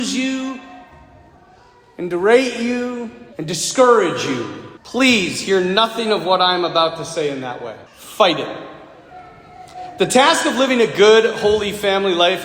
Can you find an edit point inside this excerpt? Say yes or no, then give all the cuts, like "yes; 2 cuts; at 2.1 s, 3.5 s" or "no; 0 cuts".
yes; 3 cuts; at 3.3 s, 4.8 s, 7.9 s